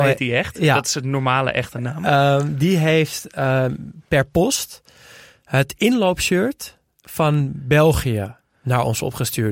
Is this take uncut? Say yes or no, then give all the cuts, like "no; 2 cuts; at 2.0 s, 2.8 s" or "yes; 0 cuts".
yes; 0 cuts